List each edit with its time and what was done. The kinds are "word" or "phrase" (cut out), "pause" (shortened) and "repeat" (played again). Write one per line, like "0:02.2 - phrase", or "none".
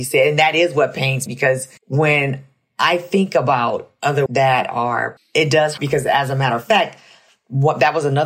0:01.3 - word
0:01.8 - pause
0:04.3 - word
0:05.2 - phrase
0:05.8 - phrase